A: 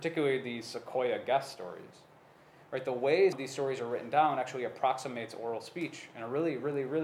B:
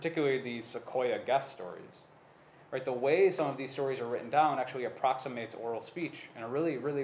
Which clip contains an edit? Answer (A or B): A